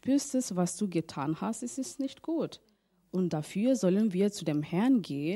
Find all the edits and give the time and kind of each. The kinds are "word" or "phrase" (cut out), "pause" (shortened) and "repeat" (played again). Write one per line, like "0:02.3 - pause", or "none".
none